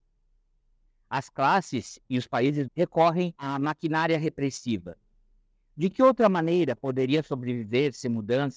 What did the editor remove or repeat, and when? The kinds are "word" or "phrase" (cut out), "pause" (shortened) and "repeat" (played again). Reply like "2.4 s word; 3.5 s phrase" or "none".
2.7 s word; 3.3 s pause

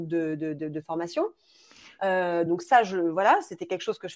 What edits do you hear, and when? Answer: none

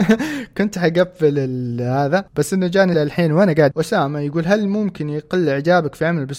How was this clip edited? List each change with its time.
2.9 s word; 3.7 s word

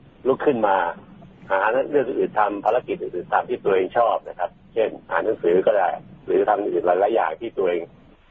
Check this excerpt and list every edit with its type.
5.0 s pause

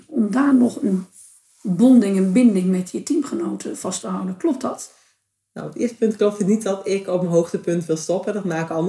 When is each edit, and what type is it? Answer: none

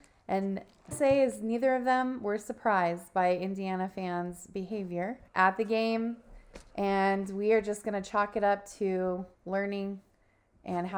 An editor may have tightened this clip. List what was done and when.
0.9 s phrase; 5.3 s pause; 9.3 s pause

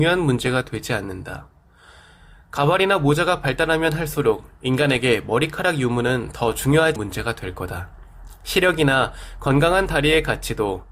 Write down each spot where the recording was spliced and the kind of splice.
7.0 s word

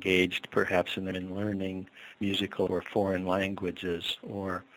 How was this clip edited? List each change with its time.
1.1 s word; 2.7 s word

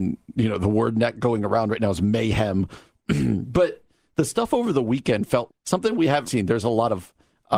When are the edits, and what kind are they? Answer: 5.5 s word; 6.3 s word

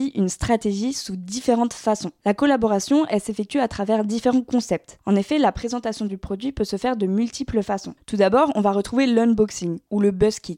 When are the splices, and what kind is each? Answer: none

